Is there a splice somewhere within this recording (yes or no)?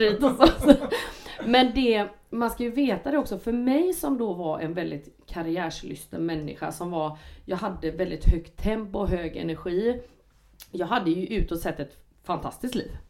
no